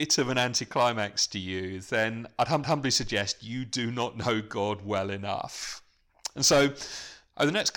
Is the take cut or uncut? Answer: cut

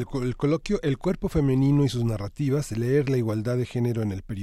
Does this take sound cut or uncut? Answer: uncut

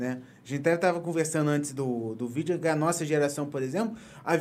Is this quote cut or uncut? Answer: uncut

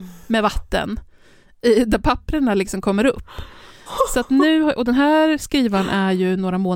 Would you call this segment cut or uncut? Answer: uncut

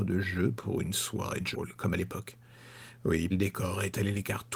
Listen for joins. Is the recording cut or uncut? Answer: cut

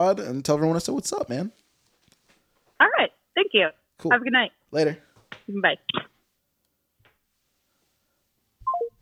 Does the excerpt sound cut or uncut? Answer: uncut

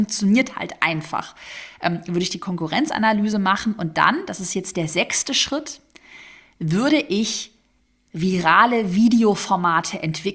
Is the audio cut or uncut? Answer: uncut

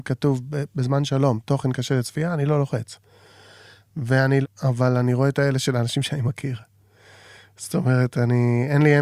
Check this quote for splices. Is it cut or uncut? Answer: cut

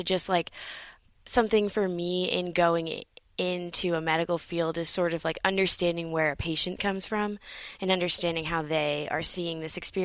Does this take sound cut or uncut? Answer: uncut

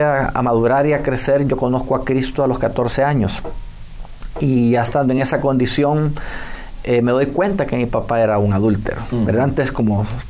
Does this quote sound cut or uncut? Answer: uncut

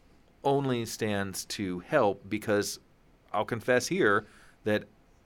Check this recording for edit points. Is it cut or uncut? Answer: uncut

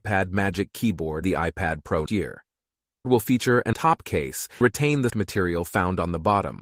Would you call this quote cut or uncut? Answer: cut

